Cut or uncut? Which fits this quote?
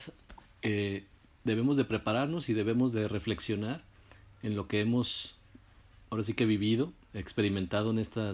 uncut